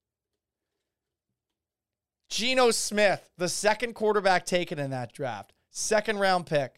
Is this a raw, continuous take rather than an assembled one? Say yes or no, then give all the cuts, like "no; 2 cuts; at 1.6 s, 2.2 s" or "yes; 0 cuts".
yes; 0 cuts